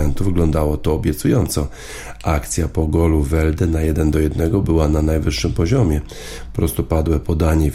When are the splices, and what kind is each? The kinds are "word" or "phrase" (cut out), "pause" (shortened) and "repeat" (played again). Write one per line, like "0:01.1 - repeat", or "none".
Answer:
none